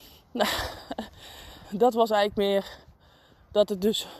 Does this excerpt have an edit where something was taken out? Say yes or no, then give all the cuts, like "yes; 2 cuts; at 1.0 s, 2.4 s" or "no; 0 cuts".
yes; 1 cut; at 1.6 s